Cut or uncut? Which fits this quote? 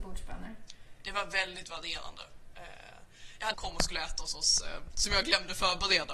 cut